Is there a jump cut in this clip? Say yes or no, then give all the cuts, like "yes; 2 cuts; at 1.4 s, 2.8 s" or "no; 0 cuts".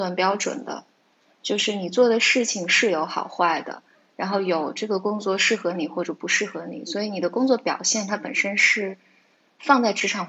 no; 0 cuts